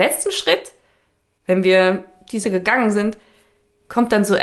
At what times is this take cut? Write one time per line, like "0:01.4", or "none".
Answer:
0:02.4

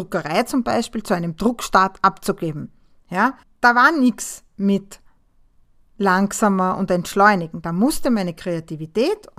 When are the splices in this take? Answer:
0:03.4

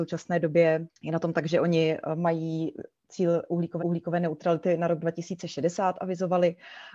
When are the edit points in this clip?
0:01.0
0:03.8

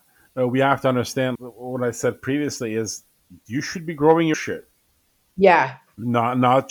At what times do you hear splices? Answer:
0:01.4
0:04.3

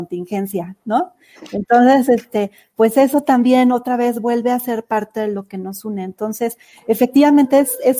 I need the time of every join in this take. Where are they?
none

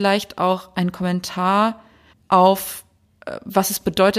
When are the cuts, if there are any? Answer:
0:02.1

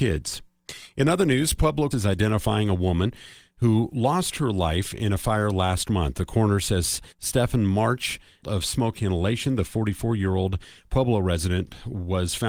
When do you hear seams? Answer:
0:01.9
0:07.1
0:08.4

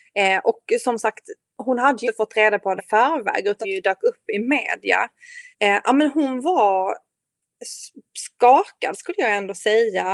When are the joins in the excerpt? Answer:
0:02.0
0:02.8
0:03.6
0:05.5

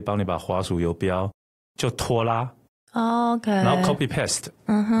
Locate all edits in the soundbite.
none

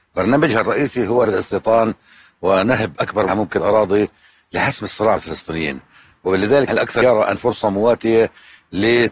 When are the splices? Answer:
0:01.2
0:03.3
0:03.6
0:05.2
0:06.7
0:07.0
0:07.4

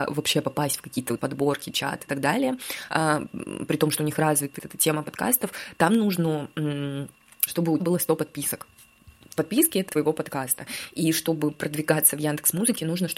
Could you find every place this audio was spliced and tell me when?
0:01.2
0:02.1
0:04.6
0:07.5
0:07.8
0:09.4
0:09.9

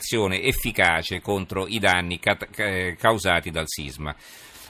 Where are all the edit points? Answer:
none

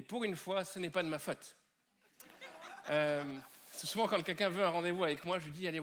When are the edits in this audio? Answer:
none

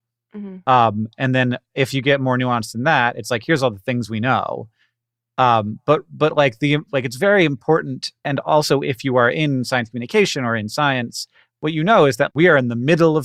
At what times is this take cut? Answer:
0:12.3

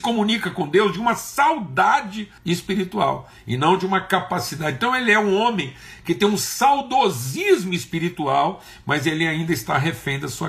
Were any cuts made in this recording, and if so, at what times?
0:02.4

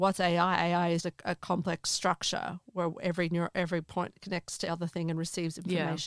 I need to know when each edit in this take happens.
0:01.0
0:04.7

